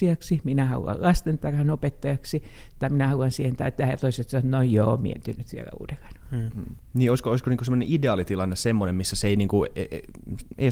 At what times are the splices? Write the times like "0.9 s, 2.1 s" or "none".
none